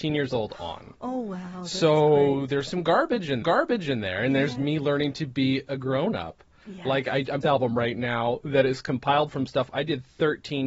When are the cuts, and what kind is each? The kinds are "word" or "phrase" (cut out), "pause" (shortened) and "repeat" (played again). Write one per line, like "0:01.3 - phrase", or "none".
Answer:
0:03.4 - repeat
0:07.4 - phrase